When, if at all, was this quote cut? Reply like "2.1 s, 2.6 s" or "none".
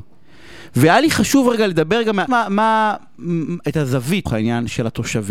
2.3 s, 4.3 s